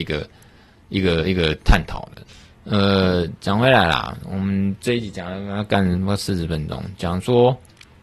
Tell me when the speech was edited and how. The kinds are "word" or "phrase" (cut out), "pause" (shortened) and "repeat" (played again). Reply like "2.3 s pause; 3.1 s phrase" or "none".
none